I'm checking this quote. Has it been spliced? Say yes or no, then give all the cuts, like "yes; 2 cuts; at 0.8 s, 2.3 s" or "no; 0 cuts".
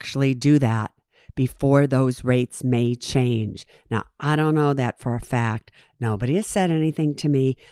no; 0 cuts